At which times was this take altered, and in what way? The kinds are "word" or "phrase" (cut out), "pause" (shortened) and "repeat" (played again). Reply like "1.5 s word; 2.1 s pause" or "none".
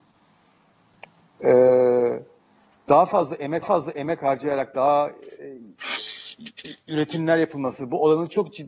3.6 s repeat